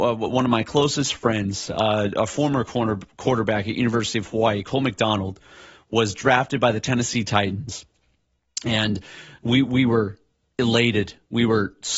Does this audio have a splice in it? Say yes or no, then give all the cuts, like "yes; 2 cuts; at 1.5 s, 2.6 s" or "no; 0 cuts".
no; 0 cuts